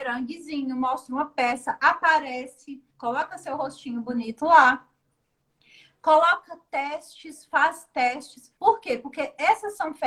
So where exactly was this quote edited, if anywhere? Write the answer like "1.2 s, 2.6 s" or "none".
2.9 s, 8.6 s